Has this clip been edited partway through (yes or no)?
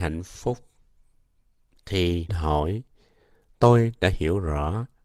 yes